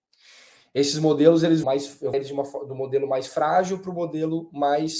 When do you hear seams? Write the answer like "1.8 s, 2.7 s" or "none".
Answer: 1.6 s, 2.1 s